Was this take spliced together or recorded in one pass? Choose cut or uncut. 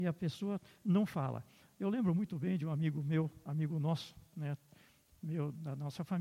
uncut